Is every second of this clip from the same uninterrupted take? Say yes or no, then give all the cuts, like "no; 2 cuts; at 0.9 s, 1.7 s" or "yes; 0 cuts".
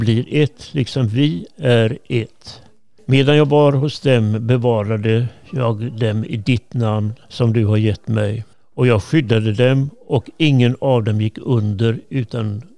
yes; 0 cuts